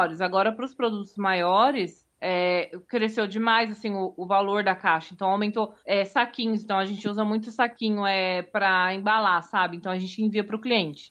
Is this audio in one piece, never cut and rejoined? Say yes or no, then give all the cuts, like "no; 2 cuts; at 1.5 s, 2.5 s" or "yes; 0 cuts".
no; 2 cuts; at 2.1 s, 5.8 s